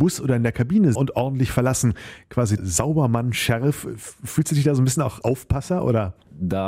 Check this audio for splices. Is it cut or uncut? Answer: cut